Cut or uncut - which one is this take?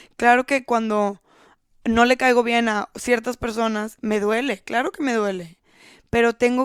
uncut